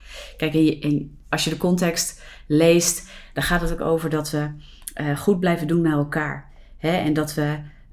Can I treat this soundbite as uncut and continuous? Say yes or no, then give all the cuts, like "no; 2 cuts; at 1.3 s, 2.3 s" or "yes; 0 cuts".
yes; 0 cuts